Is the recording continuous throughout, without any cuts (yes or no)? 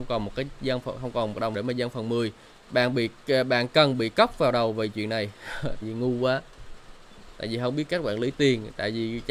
no